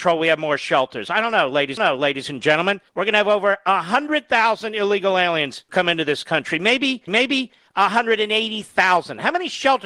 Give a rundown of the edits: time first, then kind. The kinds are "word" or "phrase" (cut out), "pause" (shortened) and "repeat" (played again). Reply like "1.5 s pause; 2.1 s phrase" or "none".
1.8 s repeat; 2.9 s pause; 5.7 s word; 7.1 s repeat